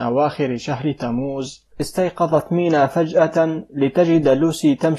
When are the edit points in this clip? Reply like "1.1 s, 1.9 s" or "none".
1.7 s

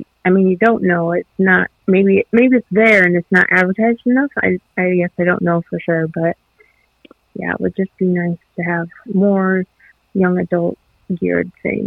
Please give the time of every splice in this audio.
none

